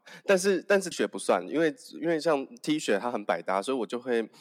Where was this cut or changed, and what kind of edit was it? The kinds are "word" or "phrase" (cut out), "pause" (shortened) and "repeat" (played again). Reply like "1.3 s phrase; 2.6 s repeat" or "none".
0.9 s word